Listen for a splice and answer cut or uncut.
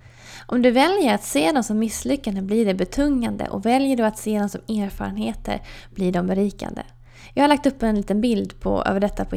uncut